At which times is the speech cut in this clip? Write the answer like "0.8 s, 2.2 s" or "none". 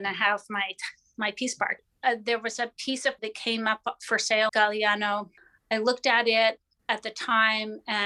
3.2 s, 4.5 s